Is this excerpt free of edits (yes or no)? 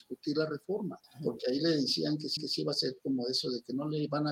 no